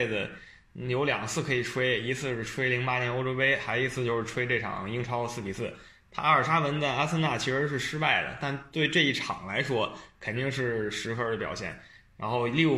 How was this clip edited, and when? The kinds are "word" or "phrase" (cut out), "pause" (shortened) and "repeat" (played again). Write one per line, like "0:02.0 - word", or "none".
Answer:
none